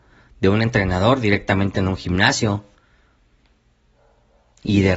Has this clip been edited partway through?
no; 0 cuts

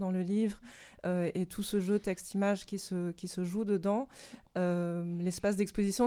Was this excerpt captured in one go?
yes; 0 cuts

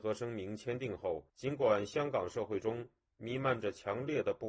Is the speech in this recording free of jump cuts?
no; 1 cut; at 1.3 s

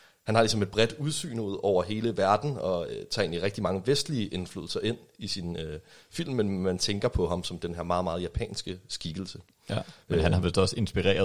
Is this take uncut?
yes; 0 cuts

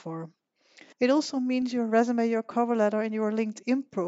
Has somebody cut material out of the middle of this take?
yes; 1 cut; at 0.9 s

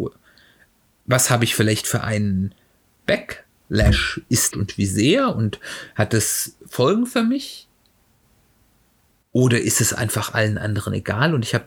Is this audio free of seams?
no; 1 cut; at 4.5 s

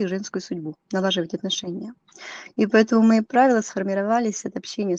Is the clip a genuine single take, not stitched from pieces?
yes; 0 cuts

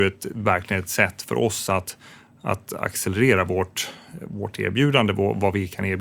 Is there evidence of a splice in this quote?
no; 0 cuts

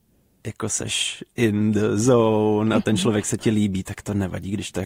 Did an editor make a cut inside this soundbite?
no; 0 cuts

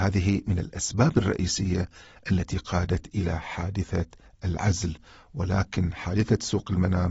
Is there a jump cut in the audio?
no; 0 cuts

